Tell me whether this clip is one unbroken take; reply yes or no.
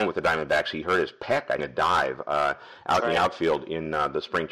no